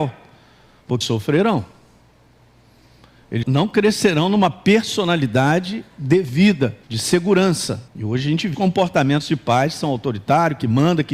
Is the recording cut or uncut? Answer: cut